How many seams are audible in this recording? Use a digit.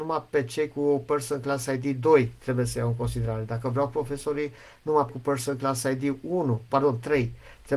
2